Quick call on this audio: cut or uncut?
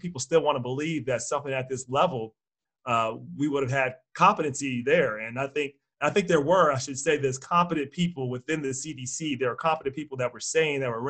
uncut